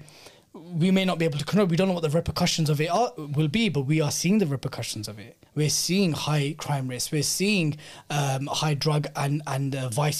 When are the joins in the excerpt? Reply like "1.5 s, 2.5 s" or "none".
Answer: 5.5 s